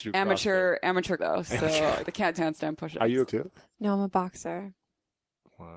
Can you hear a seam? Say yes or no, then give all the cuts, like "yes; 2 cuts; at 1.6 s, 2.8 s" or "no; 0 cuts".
yes; 4 cuts; at 1.2 s, 2.0 s, 2.4 s, 3.3 s